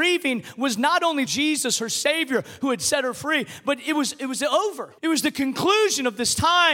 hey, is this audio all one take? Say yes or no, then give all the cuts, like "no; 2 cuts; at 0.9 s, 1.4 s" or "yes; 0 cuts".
no; 2 cuts; at 1.3 s, 5.0 s